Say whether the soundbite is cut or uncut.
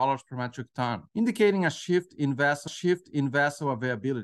cut